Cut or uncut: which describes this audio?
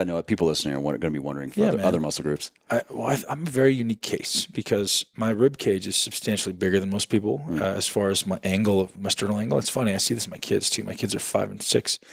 uncut